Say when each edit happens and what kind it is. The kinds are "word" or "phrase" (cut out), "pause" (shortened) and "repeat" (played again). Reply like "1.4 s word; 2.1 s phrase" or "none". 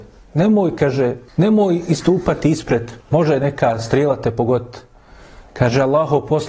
1.3 s pause; 3.0 s pause